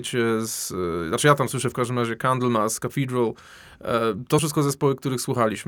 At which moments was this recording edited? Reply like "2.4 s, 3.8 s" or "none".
1.7 s, 4.4 s